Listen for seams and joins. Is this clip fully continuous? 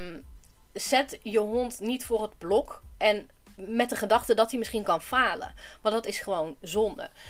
yes; 0 cuts

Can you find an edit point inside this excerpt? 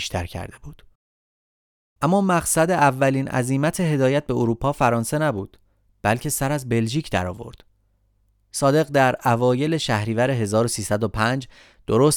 no; 0 cuts

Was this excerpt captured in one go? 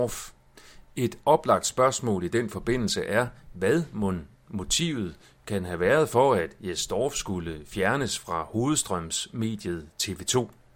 yes; 0 cuts

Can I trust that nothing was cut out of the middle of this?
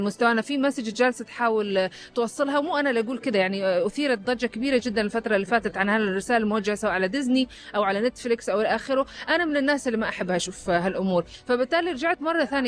yes; 0 cuts

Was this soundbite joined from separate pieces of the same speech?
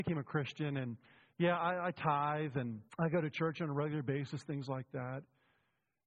yes; 1 cut; at 2.9 s

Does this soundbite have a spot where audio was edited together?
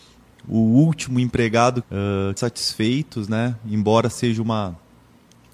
yes; 2 cuts; at 1.8 s, 2.4 s

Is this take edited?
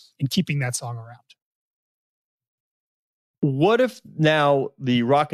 no; 0 cuts

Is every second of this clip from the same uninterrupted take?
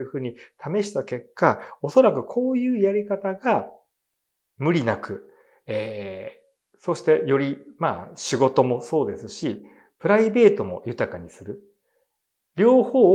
yes; 0 cuts

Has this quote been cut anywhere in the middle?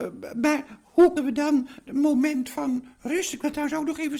yes; 2 cuts; at 1.2 s, 1.9 s

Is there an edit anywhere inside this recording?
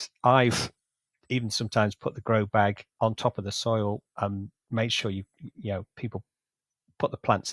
no; 0 cuts

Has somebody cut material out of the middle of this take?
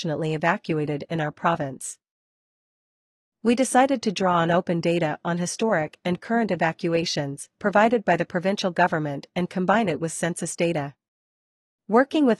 no; 0 cuts

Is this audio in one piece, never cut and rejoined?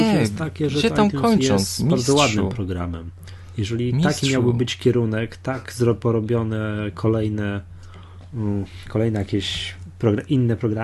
yes; 0 cuts

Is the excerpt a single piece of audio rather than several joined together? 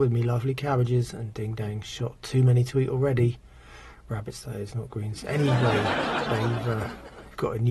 yes; 0 cuts

